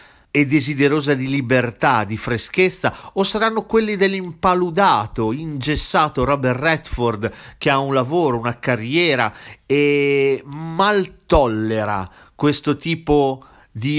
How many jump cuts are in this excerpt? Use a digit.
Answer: 0